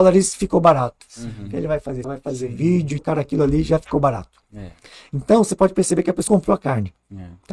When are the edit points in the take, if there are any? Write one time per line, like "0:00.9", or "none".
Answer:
0:02.0
0:03.0
0:06.3